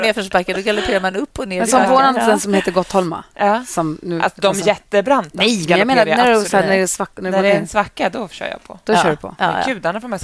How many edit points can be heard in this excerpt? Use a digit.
0